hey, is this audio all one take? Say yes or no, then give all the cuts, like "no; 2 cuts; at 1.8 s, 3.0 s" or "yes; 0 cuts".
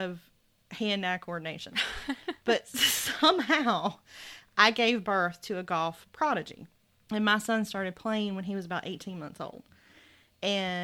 no; 1 cut; at 6.8 s